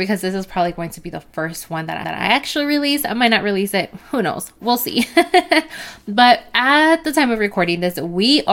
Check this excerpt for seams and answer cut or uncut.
cut